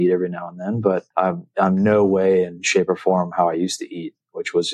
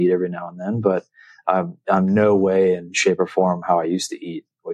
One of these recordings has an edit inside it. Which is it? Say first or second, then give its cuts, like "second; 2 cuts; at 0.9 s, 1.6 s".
first; 1 cut; at 1.1 s